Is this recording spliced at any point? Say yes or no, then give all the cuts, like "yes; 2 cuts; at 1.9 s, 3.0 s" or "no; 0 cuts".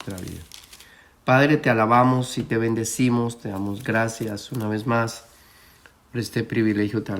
no; 0 cuts